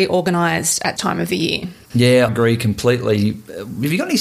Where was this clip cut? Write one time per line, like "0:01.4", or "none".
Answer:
0:01.0
0:02.3